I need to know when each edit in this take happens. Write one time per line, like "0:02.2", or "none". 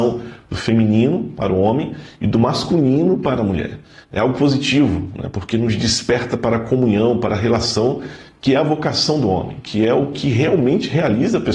none